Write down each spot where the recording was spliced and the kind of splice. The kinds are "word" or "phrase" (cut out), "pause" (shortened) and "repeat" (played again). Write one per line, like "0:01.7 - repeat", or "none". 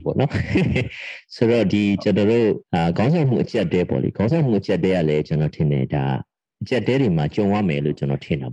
0:02.6 - pause